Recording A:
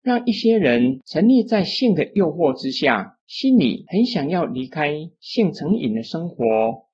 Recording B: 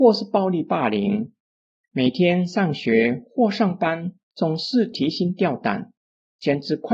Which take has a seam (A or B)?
A